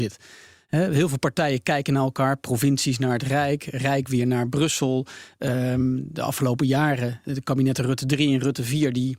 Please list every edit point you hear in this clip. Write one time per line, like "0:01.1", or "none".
none